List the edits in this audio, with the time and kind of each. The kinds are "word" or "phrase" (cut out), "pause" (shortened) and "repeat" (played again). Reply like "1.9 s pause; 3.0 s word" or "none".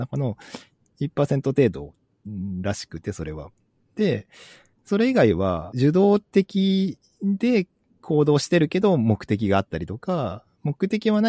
none

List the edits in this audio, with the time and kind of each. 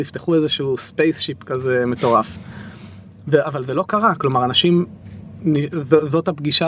none

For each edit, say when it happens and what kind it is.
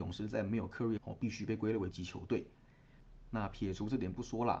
1.0 s phrase; 1.9 s word

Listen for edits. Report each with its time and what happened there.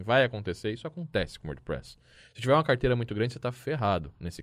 none

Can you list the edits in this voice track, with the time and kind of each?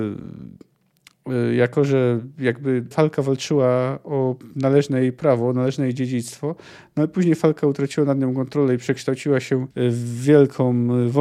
2.9 s word; 9.7 s pause

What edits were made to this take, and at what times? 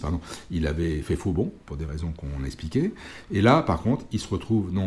1.6 s pause

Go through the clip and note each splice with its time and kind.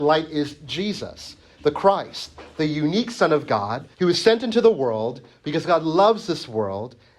3.9 s pause

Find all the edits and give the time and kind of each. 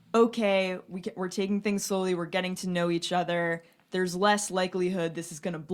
none

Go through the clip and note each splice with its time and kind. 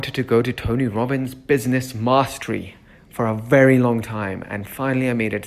none

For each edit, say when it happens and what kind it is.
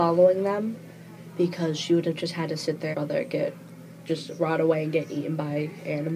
2.9 s phrase

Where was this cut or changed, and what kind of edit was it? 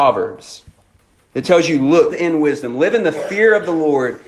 2.1 s word

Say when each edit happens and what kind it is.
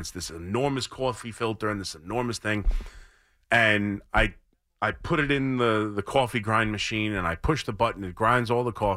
none

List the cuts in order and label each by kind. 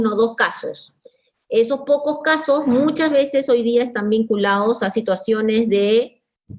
none

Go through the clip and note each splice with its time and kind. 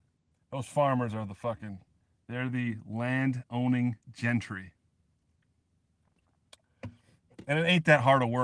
2.0 s pause; 4.0 s pause

